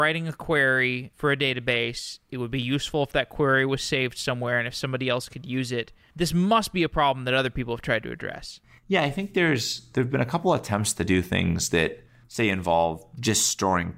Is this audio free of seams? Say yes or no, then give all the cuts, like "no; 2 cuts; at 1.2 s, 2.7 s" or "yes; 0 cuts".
yes; 0 cuts